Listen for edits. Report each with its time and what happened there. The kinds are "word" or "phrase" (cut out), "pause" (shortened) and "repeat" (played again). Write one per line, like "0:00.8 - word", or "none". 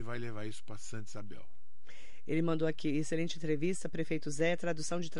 none